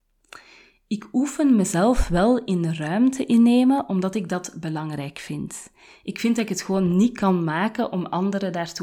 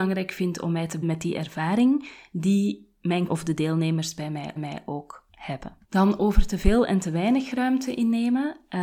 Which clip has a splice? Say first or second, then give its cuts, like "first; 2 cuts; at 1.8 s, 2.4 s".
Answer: second; 4 cuts; at 1.0 s, 3.3 s, 4.6 s, 5.8 s